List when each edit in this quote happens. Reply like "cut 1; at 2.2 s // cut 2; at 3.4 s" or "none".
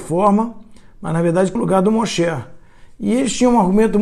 cut 1; at 1.6 s